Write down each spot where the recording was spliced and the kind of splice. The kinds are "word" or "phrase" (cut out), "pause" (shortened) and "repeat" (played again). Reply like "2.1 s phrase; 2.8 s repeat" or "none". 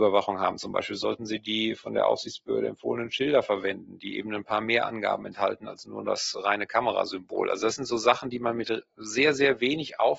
none